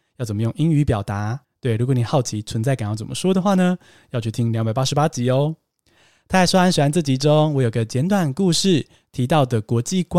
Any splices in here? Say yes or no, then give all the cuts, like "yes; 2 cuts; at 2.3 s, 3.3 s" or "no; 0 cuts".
yes; 1 cut; at 1.4 s